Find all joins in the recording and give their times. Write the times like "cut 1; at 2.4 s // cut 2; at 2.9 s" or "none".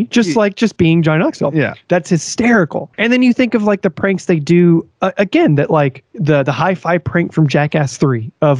cut 1; at 2.9 s // cut 2; at 6.1 s